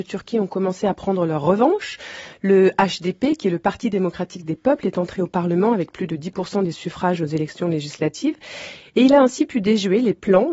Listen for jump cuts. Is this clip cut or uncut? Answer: uncut